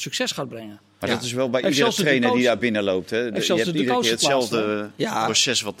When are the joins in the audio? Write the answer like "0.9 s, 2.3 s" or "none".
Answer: none